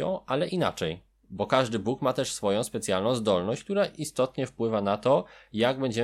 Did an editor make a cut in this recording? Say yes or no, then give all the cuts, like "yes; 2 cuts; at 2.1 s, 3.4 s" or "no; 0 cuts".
no; 0 cuts